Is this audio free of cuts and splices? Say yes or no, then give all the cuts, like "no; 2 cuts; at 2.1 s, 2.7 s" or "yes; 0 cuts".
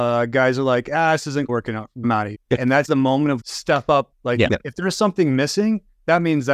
no; 7 cuts; at 1.5 s, 2.0 s, 2.3 s, 2.9 s, 3.4 s, 4.1 s, 4.5 s